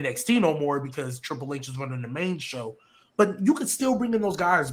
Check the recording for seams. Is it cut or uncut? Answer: uncut